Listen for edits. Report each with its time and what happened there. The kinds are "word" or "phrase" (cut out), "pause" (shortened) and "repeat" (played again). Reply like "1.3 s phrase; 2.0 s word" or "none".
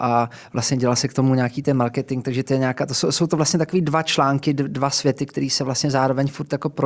none